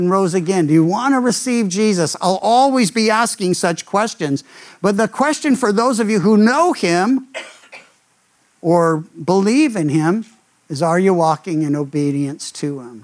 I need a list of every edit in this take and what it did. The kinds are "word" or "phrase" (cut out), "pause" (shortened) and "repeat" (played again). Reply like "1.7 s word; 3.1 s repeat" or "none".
none